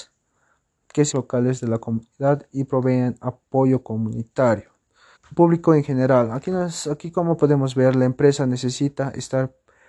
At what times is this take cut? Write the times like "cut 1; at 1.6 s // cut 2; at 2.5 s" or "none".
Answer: cut 1; at 1.1 s // cut 2; at 5.2 s